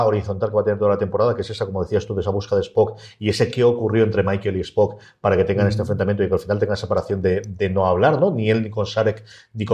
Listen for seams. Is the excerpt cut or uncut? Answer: uncut